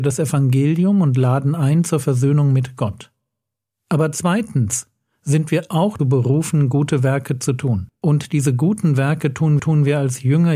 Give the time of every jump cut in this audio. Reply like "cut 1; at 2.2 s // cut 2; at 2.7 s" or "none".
cut 1; at 6.0 s // cut 2; at 8.0 s // cut 3; at 9.6 s